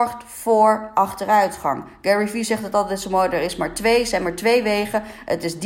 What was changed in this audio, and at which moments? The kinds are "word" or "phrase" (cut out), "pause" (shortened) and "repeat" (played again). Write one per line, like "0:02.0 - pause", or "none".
none